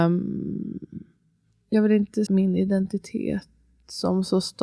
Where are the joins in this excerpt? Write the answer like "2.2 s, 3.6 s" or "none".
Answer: 2.3 s